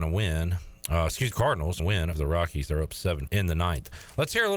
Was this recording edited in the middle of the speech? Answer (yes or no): yes